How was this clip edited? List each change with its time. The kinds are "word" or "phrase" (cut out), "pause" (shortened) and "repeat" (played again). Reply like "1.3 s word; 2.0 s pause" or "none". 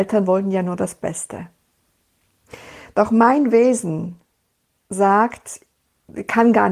4.7 s pause